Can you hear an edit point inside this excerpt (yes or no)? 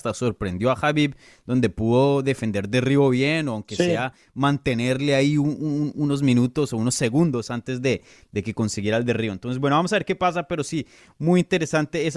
no